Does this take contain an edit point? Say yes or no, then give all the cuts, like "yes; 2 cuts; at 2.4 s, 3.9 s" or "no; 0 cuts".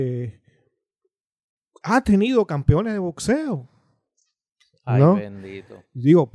no; 0 cuts